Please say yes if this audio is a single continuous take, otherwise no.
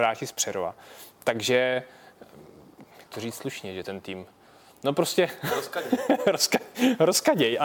yes